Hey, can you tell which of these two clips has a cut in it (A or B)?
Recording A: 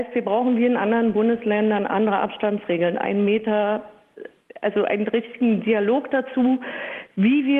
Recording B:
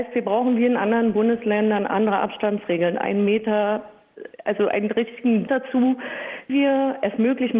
B